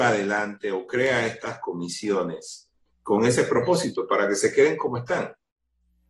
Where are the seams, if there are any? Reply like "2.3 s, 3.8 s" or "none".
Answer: none